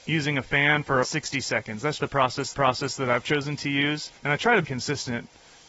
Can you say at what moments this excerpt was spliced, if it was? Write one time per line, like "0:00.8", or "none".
0:01.0
0:02.0
0:02.5
0:04.2
0:04.6